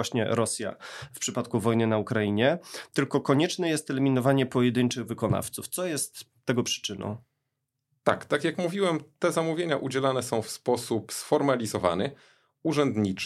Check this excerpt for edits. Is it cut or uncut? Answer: uncut